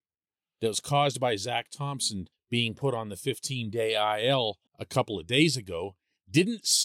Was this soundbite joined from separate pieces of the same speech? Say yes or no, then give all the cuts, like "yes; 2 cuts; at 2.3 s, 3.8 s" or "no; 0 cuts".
yes; 2 cuts; at 2.3 s, 4.7 s